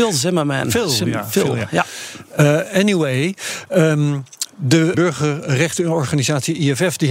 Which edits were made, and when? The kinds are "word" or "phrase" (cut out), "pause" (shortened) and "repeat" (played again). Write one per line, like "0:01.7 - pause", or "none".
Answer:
0:04.9 - word